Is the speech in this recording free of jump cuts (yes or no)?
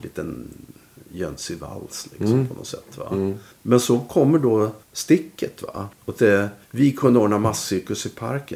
no